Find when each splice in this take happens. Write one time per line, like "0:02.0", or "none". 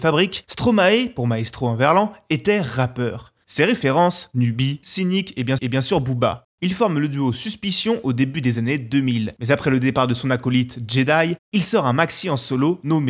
0:05.6